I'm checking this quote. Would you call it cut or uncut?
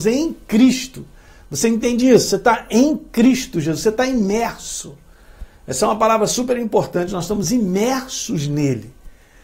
uncut